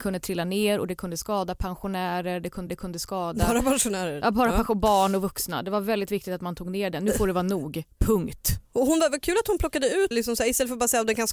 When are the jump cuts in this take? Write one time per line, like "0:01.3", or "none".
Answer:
0:02.7
0:08.7
0:10.1